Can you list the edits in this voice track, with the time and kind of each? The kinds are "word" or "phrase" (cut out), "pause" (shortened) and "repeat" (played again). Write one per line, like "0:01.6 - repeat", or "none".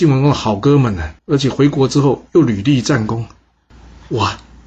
0:01.2 - pause